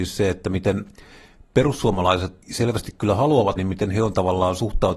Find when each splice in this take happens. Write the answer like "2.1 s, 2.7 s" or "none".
2.4 s, 3.6 s

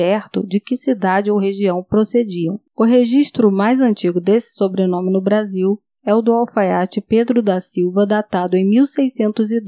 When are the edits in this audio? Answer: none

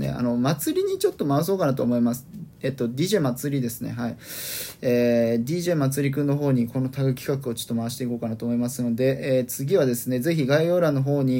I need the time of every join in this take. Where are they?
none

